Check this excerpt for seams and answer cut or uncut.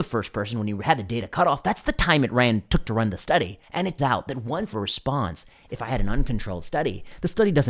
cut